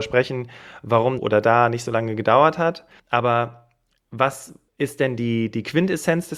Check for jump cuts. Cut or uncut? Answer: cut